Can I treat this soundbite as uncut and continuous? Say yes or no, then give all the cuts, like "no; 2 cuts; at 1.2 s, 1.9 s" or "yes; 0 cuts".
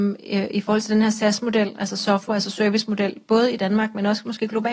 yes; 0 cuts